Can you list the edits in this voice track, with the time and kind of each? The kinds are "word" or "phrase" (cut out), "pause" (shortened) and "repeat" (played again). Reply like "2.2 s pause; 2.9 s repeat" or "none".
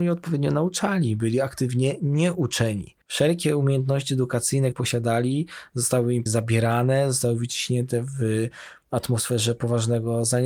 3.0 s pause; 4.7 s word; 6.3 s word